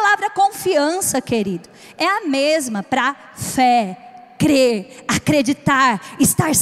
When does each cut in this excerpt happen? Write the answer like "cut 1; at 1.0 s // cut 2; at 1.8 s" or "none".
none